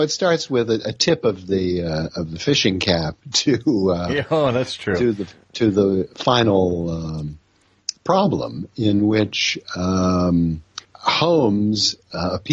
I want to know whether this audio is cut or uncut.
cut